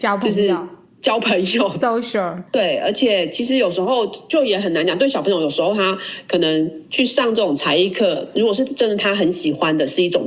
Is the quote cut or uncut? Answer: cut